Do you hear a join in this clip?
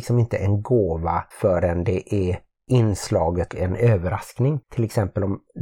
yes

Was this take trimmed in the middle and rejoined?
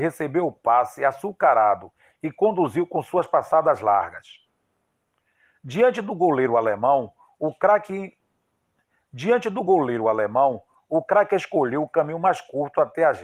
no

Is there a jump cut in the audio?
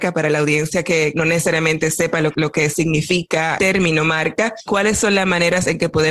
yes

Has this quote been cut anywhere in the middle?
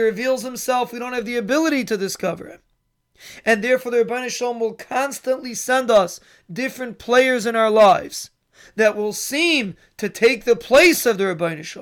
no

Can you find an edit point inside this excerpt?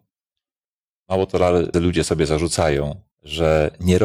yes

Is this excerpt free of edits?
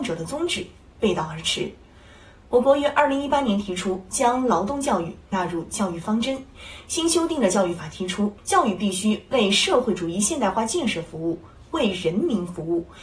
no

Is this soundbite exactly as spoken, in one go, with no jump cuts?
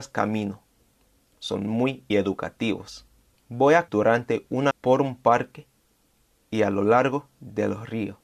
no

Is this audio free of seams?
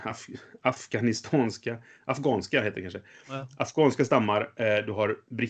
yes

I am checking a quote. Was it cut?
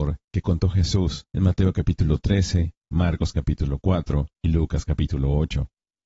yes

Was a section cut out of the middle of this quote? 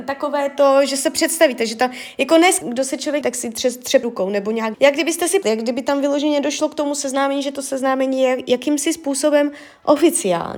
yes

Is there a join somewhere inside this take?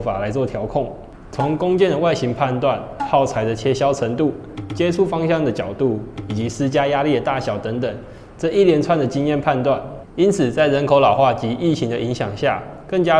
no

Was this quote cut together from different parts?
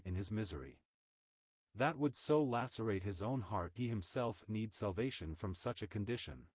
yes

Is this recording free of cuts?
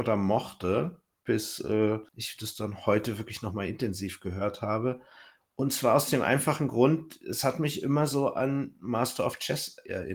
yes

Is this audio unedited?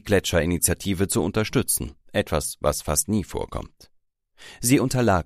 no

